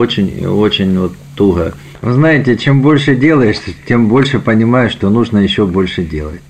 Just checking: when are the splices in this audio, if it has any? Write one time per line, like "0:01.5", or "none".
none